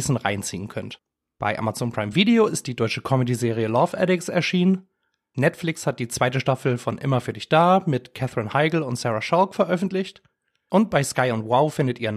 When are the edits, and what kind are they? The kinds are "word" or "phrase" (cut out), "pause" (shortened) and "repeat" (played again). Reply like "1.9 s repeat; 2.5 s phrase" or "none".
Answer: none